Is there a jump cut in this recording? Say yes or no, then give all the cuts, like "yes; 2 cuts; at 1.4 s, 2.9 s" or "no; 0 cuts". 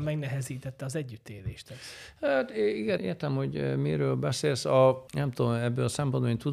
yes; 2 cuts; at 3.0 s, 5.1 s